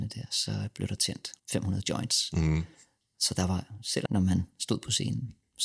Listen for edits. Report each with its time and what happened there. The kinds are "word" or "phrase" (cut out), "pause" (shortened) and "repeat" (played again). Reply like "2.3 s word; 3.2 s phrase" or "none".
1.4 s pause; 4.1 s phrase